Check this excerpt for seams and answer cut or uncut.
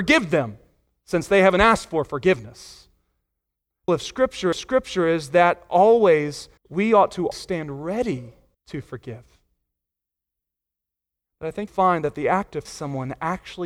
cut